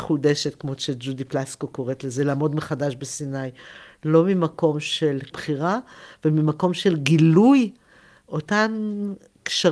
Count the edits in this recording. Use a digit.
1